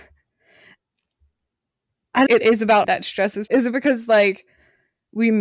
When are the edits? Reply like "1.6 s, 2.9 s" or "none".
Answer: 2.3 s, 2.8 s, 3.5 s